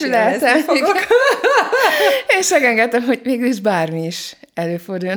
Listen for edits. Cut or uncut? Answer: uncut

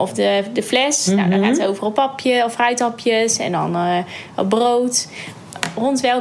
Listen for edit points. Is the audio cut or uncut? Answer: uncut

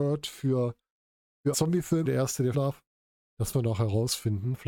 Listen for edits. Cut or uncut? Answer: cut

